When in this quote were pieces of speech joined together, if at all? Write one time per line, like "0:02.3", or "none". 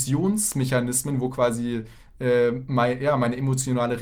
none